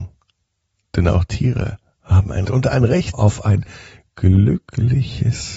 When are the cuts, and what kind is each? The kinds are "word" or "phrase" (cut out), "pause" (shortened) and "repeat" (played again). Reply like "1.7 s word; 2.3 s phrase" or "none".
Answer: 2.4 s phrase; 3.1 s word

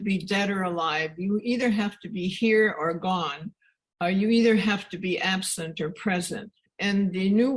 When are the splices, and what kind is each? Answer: none

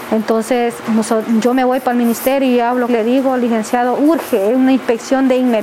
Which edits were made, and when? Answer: 2.9 s phrase

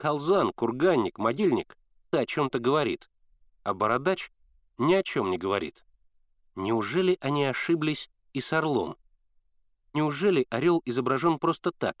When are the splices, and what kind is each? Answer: 2.1 s word

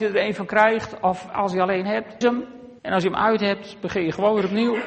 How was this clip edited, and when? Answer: 2.2 s word; 2.8 s pause

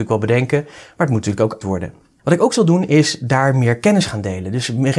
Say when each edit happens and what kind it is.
1.6 s word

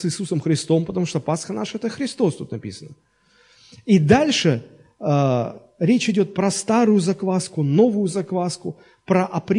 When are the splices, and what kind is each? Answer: none

